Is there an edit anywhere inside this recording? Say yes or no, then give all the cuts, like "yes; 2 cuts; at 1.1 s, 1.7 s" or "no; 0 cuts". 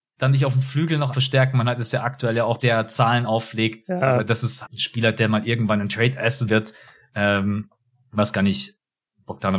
yes; 4 cuts; at 1.1 s, 2.6 s, 4.7 s, 6.5 s